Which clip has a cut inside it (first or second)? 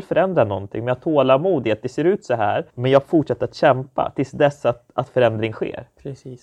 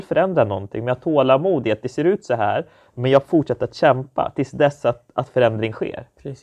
first